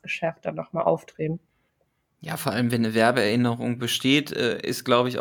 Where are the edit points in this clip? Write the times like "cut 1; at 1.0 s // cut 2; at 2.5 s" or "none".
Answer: none